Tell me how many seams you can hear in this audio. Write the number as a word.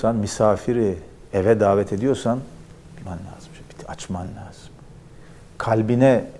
one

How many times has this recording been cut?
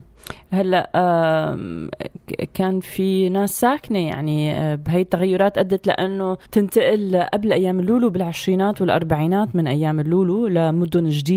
one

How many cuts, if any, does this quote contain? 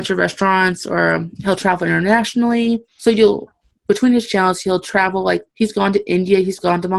two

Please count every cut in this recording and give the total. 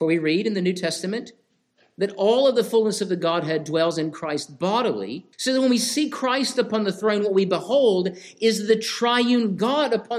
one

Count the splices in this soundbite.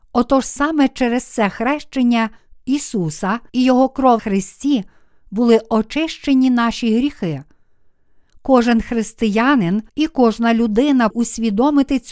four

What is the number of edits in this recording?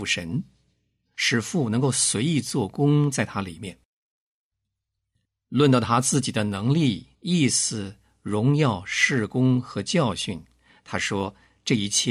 one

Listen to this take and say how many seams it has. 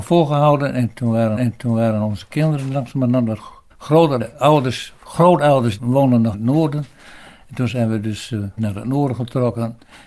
six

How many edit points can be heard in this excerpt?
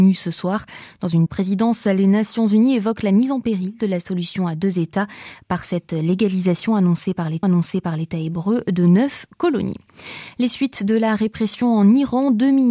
two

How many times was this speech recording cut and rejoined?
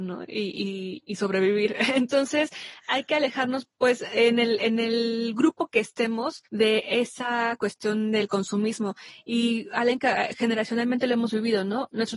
one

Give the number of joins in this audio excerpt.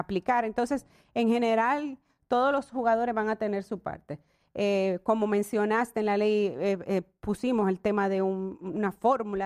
zero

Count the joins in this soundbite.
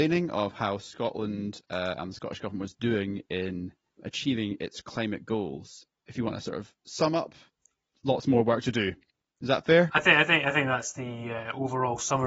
zero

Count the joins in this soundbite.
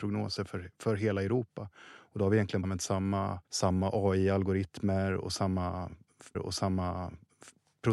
three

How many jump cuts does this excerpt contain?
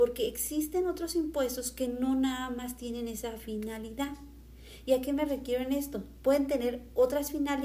zero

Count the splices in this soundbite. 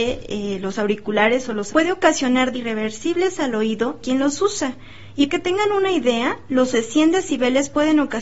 five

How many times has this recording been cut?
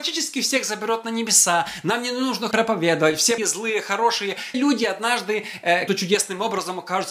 four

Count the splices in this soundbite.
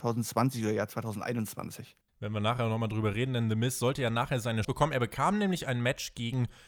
two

